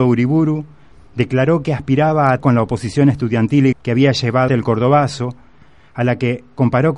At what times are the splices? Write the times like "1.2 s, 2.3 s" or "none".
2.4 s, 3.7 s, 4.5 s